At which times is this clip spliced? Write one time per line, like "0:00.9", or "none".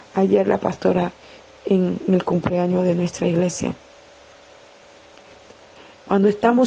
none